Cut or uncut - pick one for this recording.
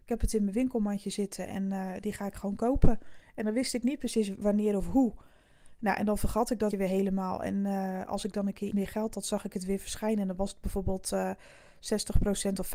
cut